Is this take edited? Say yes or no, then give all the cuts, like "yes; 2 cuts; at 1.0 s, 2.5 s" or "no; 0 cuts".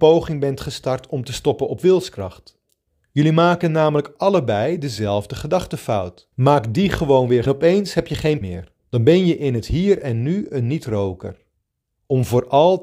yes; 5 cuts; at 2.9 s, 6.3 s, 7.5 s, 8.4 s, 8.8 s